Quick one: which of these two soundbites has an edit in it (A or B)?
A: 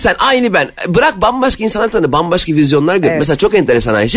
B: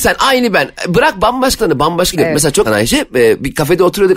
B